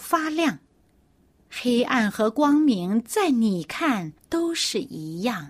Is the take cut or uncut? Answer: cut